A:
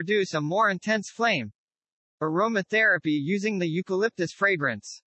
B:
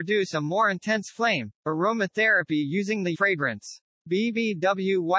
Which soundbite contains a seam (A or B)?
B